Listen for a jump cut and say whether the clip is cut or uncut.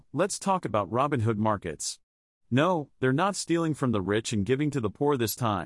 uncut